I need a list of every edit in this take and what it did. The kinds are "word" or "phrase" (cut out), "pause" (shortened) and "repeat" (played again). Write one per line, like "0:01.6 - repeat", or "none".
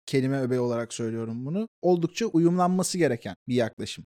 none

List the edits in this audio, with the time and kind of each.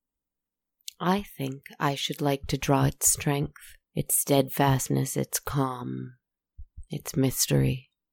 0:03.8 - pause

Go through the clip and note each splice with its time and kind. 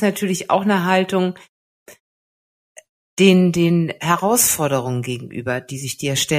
none

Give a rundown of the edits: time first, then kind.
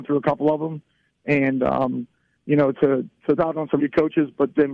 0:02.7 - word
0:03.4 - word
0:03.8 - word

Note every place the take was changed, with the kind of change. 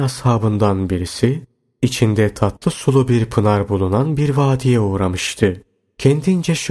none

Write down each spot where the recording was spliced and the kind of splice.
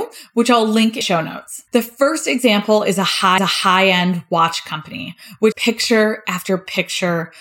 0:01.0 - word
0:01.7 - pause
0:03.4 - repeat
0:05.5 - word

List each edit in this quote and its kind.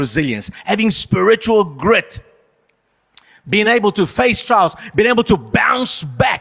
none

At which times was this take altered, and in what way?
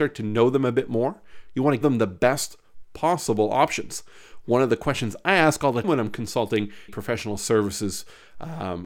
0:01.8 - word
0:05.8 - word
0:06.9 - word

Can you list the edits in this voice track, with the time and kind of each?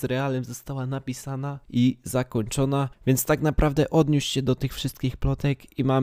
0:01.6 - pause

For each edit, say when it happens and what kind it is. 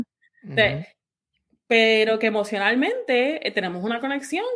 none

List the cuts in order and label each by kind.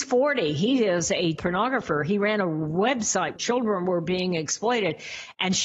0:01.4 - word
0:03.4 - word

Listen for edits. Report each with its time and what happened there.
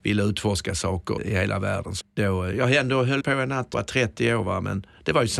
0:01.2 - word
0:02.0 - word
0:03.2 - word
0:03.7 - word

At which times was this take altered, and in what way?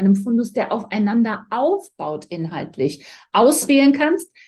none

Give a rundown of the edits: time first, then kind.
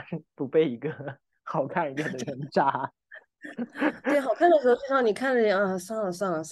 none

